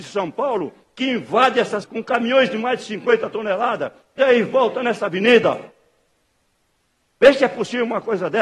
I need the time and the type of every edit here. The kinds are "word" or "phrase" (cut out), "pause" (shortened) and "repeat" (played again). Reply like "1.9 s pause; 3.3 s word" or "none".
1.8 s word; 4.2 s word